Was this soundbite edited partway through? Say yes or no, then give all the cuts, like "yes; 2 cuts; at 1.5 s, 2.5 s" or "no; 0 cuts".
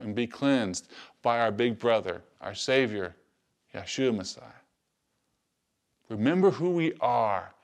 no; 0 cuts